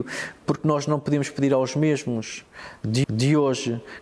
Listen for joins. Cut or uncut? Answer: cut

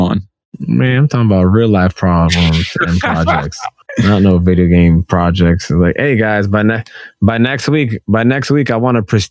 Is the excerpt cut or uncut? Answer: cut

